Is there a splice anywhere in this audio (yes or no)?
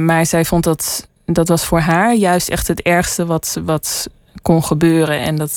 no